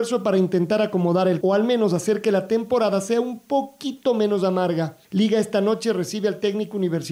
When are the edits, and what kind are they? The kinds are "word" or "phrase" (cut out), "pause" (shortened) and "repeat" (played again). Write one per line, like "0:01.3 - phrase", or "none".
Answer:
0:01.4 - word
0:05.0 - pause